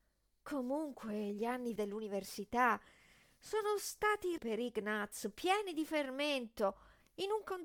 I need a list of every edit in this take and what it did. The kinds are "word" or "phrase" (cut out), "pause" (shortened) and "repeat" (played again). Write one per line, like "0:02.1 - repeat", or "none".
0:01.8 - word
0:04.4 - word